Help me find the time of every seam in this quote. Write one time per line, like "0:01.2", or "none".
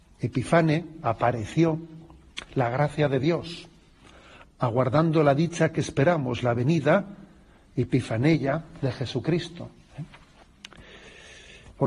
none